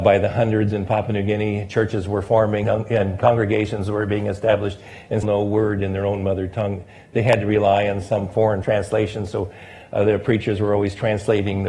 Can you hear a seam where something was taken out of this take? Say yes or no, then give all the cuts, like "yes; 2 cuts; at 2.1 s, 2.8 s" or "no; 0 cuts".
yes; 3 cuts; at 2.6 s, 5.2 s, 8.6 s